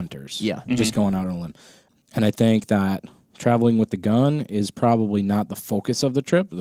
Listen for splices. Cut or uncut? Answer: uncut